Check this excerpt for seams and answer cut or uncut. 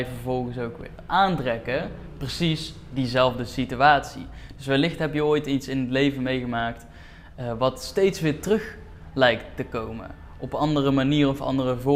uncut